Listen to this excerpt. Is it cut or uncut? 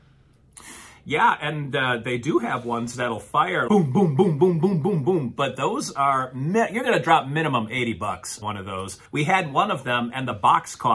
cut